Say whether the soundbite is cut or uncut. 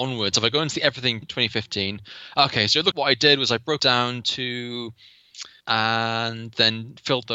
cut